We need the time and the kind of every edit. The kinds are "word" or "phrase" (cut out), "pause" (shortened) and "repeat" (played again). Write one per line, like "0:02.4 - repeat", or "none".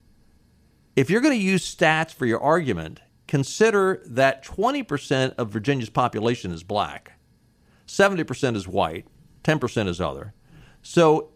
none